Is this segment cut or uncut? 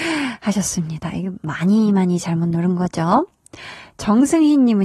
uncut